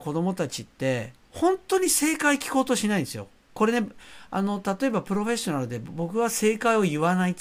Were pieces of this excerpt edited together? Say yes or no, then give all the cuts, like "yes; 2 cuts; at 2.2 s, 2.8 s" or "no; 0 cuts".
yes; 1 cut; at 1.2 s